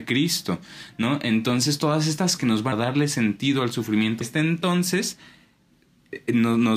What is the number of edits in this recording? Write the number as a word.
three